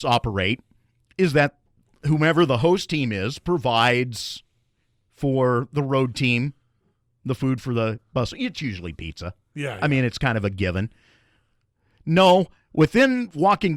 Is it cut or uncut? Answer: uncut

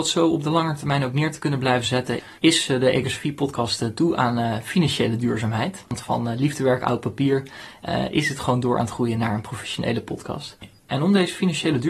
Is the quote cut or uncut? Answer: cut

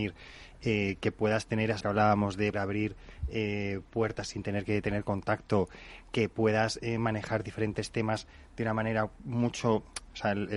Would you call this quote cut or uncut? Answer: cut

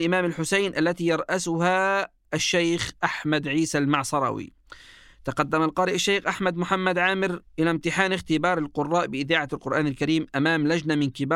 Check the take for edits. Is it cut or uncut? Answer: cut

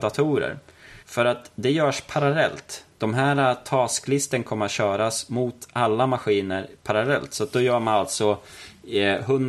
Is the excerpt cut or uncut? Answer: cut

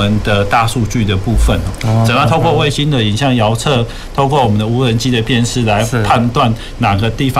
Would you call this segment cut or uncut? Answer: uncut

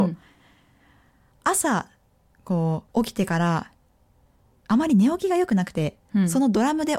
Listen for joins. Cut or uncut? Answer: cut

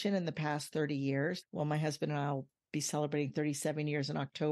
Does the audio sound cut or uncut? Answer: uncut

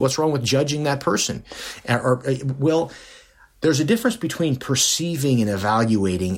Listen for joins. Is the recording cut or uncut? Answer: uncut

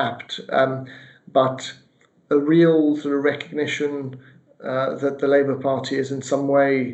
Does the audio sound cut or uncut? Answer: uncut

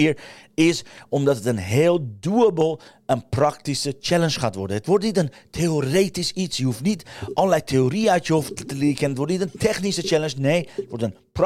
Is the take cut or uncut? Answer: uncut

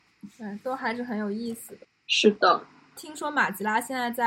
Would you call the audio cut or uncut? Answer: uncut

